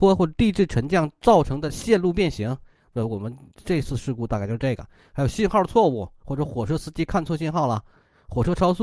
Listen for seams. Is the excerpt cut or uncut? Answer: uncut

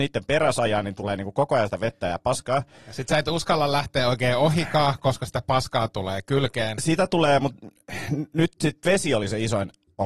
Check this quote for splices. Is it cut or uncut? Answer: uncut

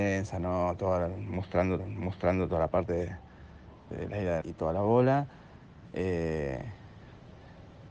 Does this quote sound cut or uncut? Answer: cut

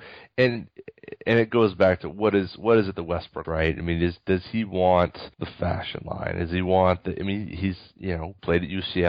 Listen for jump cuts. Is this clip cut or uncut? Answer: cut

